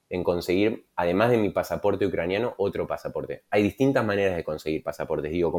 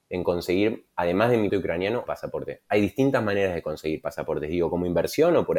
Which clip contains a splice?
second; 2 cuts; at 1.5 s, 2.1 s

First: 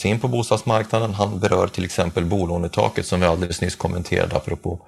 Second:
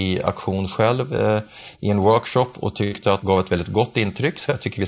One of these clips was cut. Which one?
second; 1 cut; at 3.2 s

